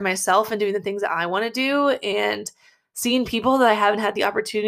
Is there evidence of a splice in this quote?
no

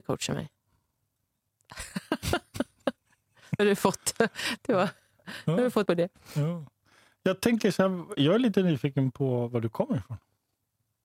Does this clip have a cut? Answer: yes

